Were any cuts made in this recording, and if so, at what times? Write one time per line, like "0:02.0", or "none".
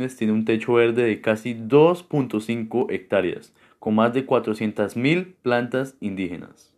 none

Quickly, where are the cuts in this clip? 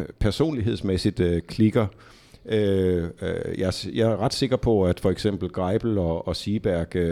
none

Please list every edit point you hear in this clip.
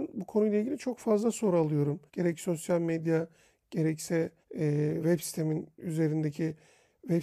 0:02.1
0:04.4
0:05.7

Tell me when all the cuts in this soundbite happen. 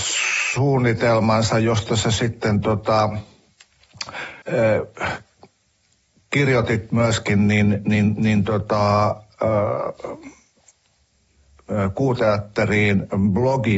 0:04.4

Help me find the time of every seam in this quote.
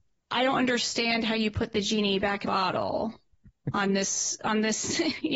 0:02.4

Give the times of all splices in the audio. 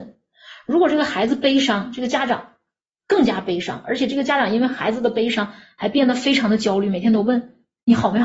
none

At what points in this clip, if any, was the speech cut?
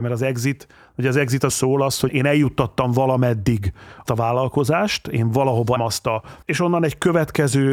0:01.5
0:02.1
0:04.1
0:05.8
0:06.4

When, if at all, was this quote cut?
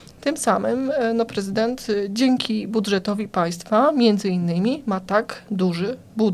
none

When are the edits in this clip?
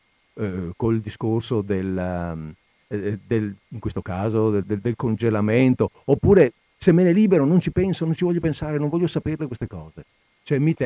none

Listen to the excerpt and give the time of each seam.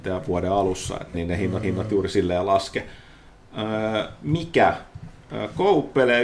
0:01.1
0:01.6

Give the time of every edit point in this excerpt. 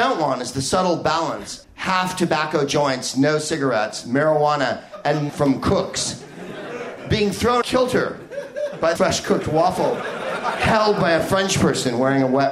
0:01.6
0:05.3
0:07.6
0:09.0

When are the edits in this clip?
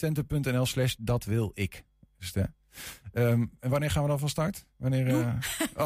none

